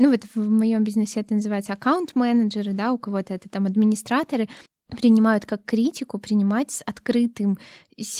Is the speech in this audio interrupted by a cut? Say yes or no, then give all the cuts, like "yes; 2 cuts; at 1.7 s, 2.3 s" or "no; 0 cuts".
yes; 1 cut; at 4.7 s